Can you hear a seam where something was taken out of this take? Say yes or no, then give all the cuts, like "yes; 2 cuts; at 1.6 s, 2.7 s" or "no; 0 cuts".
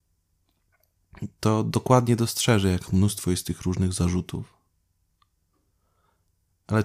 no; 0 cuts